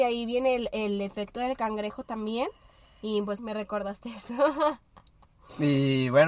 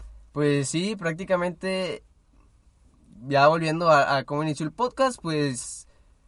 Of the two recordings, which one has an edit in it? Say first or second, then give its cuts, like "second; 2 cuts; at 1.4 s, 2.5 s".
first; 1 cut; at 3.4 s